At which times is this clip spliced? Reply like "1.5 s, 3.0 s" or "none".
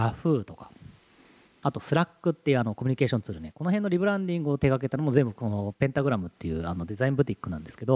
none